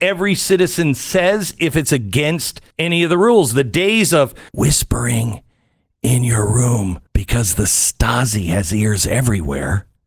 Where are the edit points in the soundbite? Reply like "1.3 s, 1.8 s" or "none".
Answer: 2.7 s, 4.5 s, 7.1 s